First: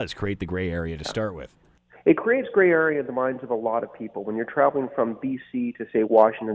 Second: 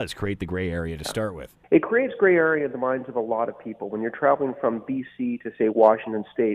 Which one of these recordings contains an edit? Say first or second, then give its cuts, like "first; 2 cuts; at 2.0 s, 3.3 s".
second; 1 cut; at 1.6 s